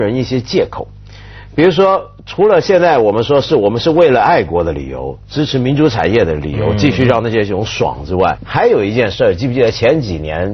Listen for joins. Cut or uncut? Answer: cut